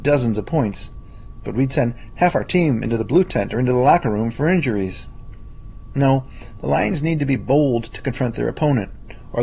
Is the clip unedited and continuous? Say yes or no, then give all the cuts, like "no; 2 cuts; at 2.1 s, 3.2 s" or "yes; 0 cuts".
yes; 0 cuts